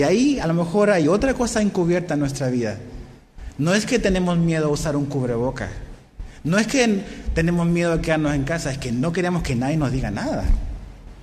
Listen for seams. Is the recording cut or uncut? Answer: uncut